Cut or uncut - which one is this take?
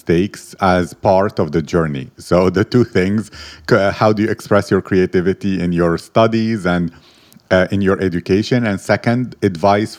uncut